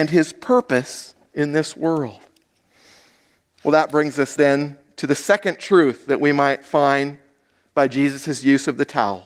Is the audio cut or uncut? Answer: uncut